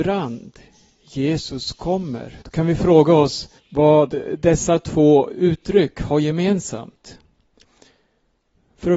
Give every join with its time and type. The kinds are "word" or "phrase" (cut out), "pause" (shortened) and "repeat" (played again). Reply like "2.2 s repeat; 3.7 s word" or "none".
2.4 s pause; 3.6 s pause

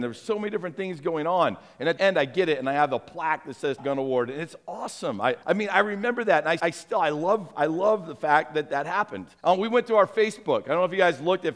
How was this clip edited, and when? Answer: 2.0 s word; 3.8 s word; 5.4 s pause; 6.6 s word; 9.4 s pause

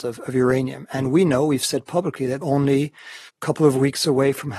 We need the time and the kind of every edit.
2.4 s word; 3.3 s pause

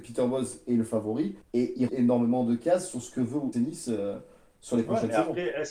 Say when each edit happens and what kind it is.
1.4 s pause; 1.9 s word; 3.5 s word

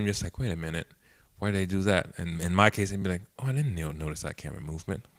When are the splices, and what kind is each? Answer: none

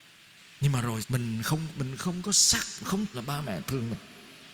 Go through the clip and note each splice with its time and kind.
1.0 s word; 1.7 s word; 2.8 s word; 3.1 s word

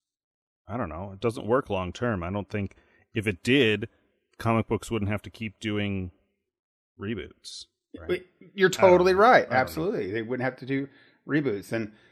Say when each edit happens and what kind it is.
none

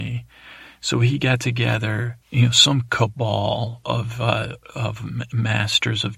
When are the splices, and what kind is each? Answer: 2.2 s pause

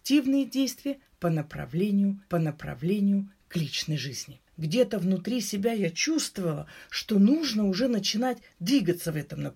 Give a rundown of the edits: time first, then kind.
2.3 s repeat; 4.5 s pause

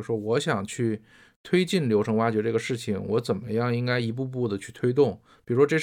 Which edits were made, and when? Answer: none

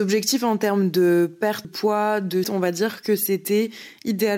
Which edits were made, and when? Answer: 1.6 s word; 2.4 s word

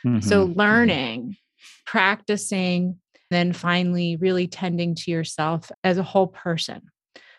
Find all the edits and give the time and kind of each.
3.3 s word; 5.7 s word

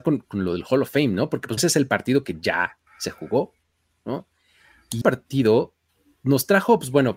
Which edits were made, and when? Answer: 1.6 s word; 2.9 s pause; 5.0 s word

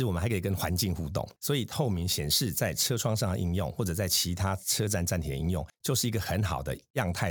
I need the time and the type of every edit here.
5.7 s pause

